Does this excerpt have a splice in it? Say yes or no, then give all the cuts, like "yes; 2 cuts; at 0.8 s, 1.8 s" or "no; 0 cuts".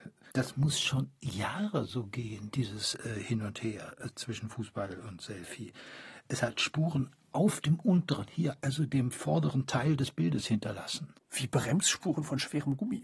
no; 0 cuts